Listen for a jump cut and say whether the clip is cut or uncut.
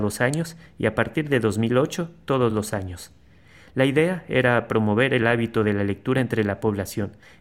uncut